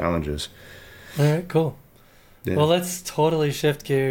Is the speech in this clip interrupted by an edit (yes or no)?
no